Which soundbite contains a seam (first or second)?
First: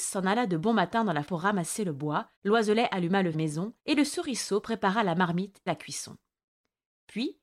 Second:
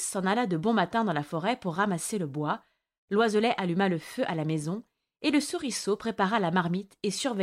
first